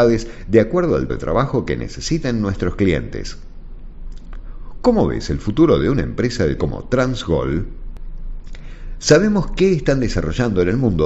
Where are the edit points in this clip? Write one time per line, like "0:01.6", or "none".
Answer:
0:01.1
0:06.6